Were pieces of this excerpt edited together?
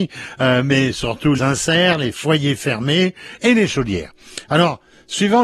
yes; 1 cut; at 1.4 s

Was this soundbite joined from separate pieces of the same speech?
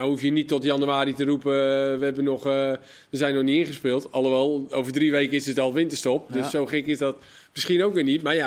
no; 0 cuts

